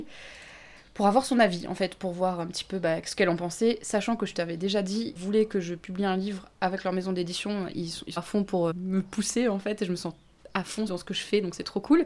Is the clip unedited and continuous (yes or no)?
no